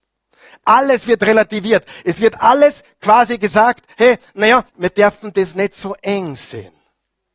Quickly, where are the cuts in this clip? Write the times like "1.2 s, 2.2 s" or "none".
4.7 s